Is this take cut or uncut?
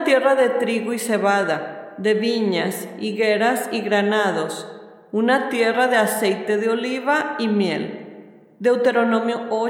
uncut